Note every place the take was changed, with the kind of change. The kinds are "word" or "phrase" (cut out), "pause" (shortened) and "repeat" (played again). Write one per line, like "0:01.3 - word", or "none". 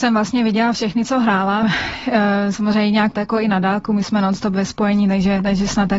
0:01.6 - phrase
0:03.1 - word